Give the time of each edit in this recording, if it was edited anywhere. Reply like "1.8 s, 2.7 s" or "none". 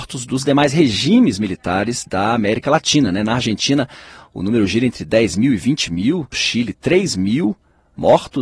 6.3 s